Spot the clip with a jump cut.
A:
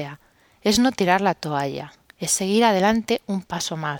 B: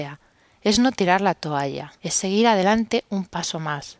B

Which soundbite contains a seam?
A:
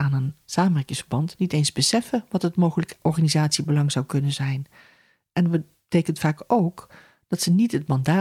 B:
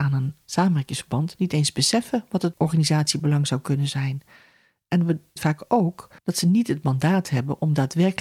B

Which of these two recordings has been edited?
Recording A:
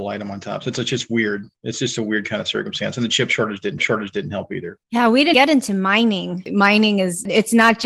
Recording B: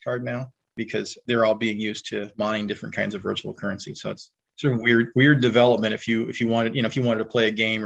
A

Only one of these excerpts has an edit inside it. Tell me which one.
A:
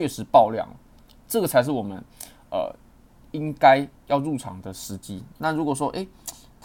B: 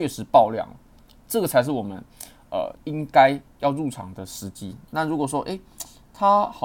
B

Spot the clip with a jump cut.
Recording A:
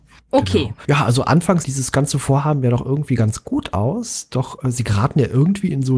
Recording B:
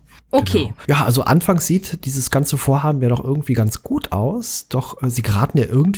A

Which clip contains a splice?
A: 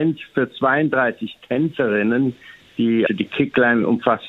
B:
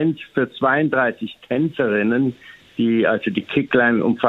A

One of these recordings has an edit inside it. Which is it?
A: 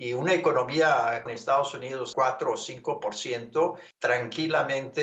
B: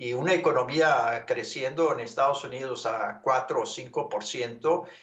A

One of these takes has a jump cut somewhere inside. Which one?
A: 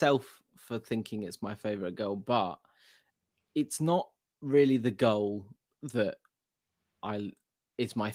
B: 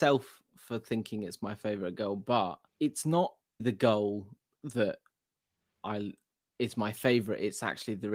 B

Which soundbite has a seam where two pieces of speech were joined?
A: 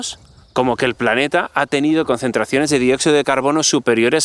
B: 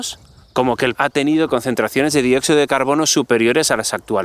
B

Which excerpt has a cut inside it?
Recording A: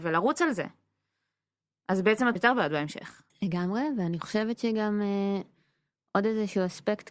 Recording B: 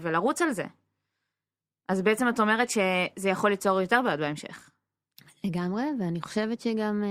A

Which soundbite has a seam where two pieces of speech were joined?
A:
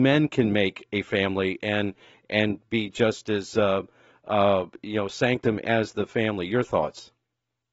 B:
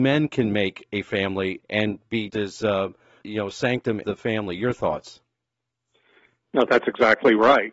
B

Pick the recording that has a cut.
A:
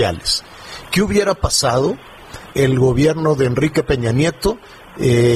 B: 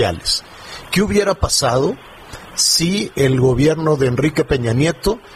A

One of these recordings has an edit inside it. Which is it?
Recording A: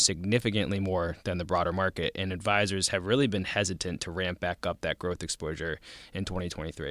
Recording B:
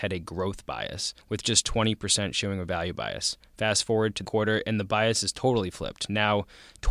B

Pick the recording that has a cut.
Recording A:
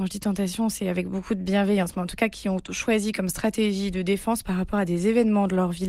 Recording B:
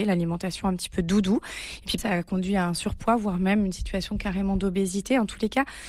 B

